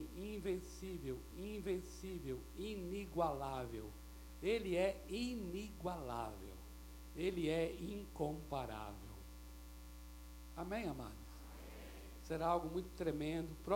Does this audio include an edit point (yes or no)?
yes